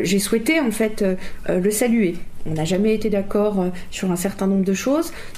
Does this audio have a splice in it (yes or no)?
no